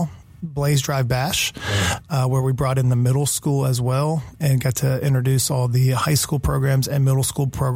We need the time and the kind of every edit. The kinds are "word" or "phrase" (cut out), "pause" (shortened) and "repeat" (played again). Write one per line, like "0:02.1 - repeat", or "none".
none